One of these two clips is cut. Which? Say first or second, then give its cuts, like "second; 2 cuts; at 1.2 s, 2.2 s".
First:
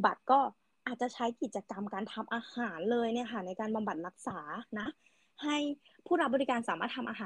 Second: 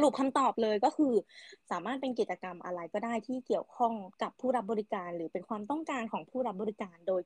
second; 1 cut; at 4.1 s